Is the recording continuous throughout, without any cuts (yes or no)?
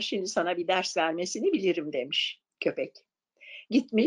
yes